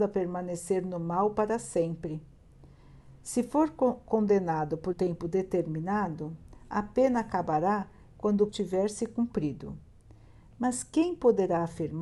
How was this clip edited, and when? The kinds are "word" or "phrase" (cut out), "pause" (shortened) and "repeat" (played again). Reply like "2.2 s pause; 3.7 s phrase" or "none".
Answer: 4.9 s word; 8.5 s word